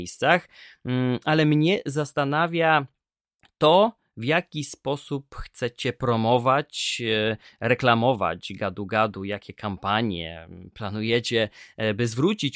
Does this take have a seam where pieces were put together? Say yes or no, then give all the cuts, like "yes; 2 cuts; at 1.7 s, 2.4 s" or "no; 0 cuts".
no; 0 cuts